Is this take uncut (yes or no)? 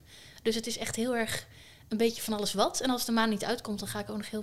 yes